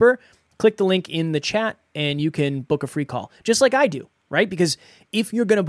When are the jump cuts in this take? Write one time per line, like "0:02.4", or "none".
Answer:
none